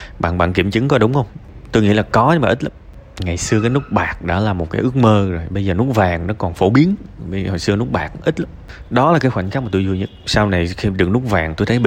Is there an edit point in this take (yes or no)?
no